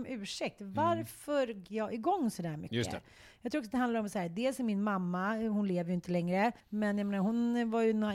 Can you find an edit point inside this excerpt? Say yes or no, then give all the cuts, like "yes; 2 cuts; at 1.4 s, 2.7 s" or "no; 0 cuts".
yes; 2 cuts; at 1.6 s, 6.6 s